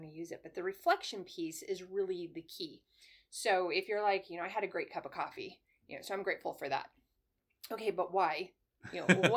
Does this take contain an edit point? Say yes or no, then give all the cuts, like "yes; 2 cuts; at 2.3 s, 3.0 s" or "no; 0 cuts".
no; 0 cuts